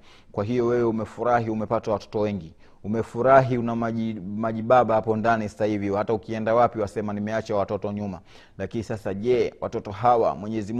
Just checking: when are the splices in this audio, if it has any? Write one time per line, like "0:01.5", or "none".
none